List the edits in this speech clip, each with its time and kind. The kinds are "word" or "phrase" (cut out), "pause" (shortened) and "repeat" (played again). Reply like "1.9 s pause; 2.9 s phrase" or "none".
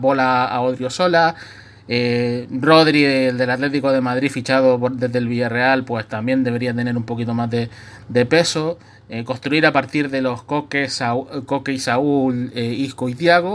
none